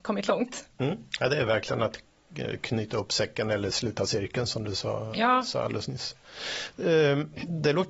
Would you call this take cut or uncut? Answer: uncut